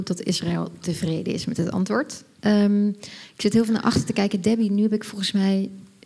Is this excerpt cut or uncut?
uncut